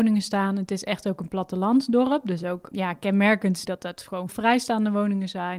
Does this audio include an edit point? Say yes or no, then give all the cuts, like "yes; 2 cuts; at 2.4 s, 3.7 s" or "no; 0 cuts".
yes; 3 cuts; at 2.7 s, 3.6 s, 4.3 s